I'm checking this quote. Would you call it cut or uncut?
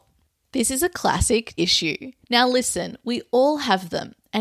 cut